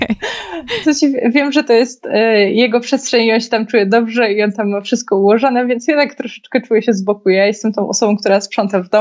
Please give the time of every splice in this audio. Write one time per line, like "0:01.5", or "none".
none